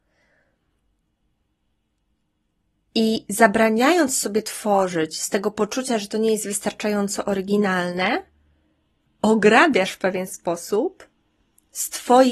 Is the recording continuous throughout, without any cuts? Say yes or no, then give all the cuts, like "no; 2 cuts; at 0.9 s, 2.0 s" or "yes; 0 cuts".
yes; 0 cuts